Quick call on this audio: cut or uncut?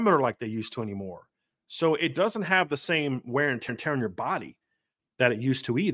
cut